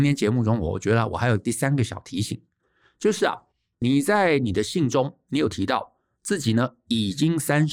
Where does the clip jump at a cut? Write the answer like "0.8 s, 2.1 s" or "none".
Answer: none

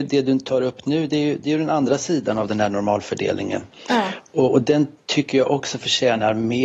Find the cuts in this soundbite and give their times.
none

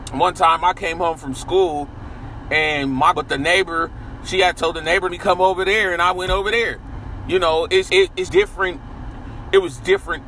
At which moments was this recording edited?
3.1 s, 5.1 s, 7.9 s, 8.3 s

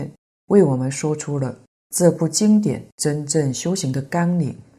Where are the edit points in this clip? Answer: 2.9 s

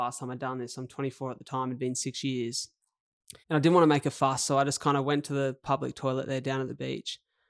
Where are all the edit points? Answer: 3.4 s

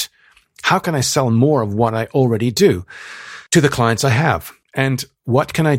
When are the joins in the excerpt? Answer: 3.5 s, 4.6 s

